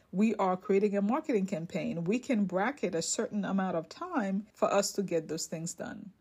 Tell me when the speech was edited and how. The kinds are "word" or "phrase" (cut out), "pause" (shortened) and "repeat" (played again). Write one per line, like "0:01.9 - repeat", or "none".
0:04.5 - pause